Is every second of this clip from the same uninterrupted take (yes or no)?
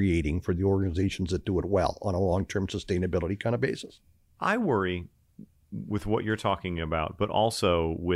yes